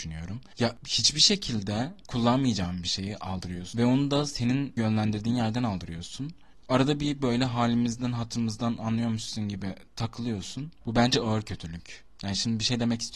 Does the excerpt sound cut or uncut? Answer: uncut